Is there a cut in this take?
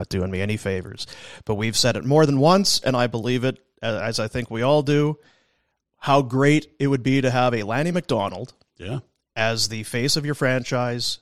no; 0 cuts

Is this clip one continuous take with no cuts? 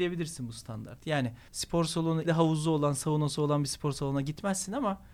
no; 2 cuts; at 1.5 s, 2.2 s

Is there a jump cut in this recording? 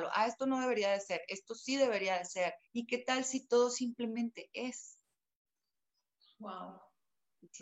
yes; 1 cut; at 2.6 s

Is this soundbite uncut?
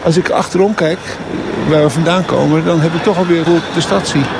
no; 1 cut; at 3.5 s

